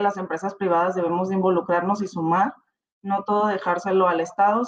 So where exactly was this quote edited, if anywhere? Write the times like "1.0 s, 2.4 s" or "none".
none